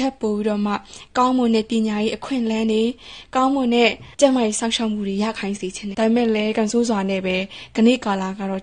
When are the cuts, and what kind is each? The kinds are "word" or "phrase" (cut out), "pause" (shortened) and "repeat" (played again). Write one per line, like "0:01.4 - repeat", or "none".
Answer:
0:04.1 - pause
0:05.9 - word